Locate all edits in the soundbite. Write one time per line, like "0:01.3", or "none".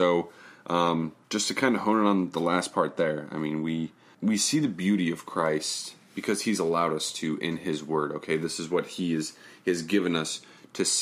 0:01.2
0:04.1